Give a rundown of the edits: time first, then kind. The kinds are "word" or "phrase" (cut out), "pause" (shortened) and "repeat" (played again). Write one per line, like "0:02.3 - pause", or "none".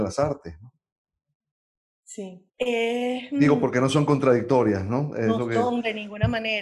0:02.5 - pause